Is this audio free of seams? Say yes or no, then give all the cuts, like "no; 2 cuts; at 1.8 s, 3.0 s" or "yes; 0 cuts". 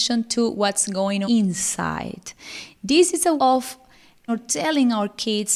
no; 3 cuts; at 1.2 s, 3.4 s, 4.3 s